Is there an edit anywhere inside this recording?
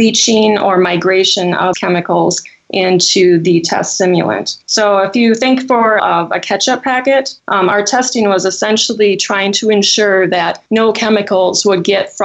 yes; 5 cuts; at 1.7 s, 4.6 s, 6.0 s, 7.4 s, 10.7 s

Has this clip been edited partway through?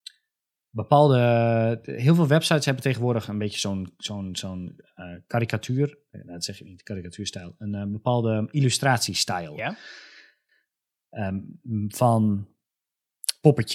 no; 0 cuts

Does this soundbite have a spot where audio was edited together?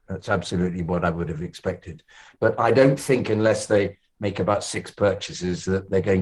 no; 0 cuts

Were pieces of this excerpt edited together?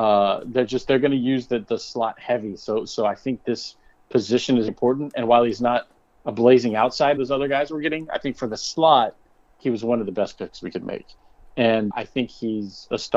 yes; 3 cuts; at 4.7 s, 7.2 s, 11.9 s

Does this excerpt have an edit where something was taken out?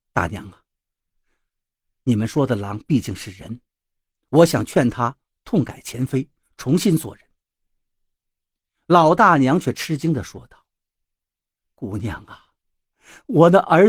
no; 0 cuts

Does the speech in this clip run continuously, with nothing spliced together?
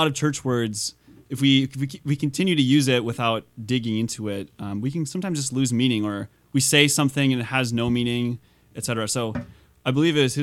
yes; 0 cuts

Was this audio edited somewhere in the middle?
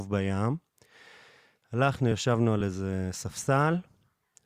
no; 0 cuts

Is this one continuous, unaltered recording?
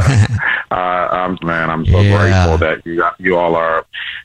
no; 1 cut; at 1.4 s

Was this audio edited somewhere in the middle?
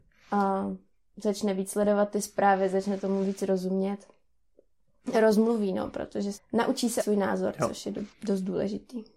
yes; 4 cuts; at 5.1 s, 6.3 s, 7.0 s, 8.1 s

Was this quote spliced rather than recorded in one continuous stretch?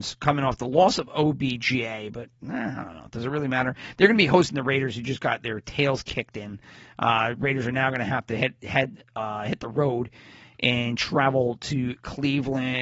no; 0 cuts

